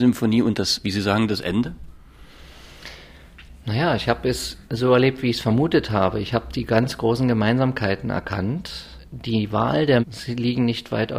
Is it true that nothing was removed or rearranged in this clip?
no; 2 cuts; at 4.6 s, 10.0 s

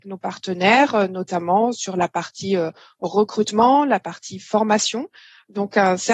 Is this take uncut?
yes; 0 cuts

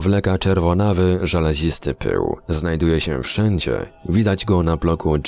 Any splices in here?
no; 0 cuts

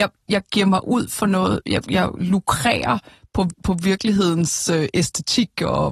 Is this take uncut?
yes; 0 cuts

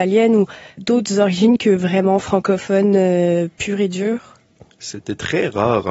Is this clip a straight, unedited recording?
yes; 0 cuts

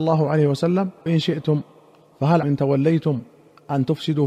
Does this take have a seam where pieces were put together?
yes; 2 cuts; at 1.1 s, 2.4 s

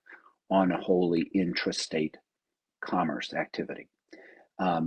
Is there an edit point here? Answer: no; 0 cuts

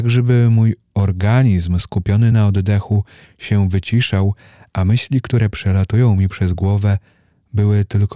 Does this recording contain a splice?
no; 0 cuts

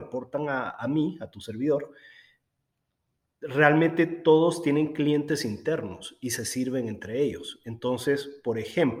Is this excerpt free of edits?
yes; 0 cuts

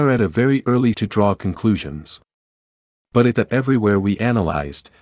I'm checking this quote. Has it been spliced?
yes; 2 cuts; at 0.9 s, 3.3 s

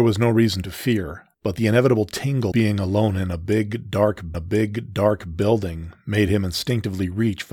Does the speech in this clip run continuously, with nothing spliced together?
no; 3 cuts; at 1.3 s, 2.5 s, 4.3 s

